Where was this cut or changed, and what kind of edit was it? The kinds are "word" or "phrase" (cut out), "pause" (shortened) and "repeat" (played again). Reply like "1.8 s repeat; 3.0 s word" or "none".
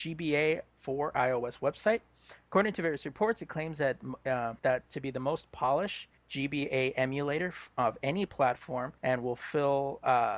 4.6 s pause; 6.2 s pause; 9.0 s pause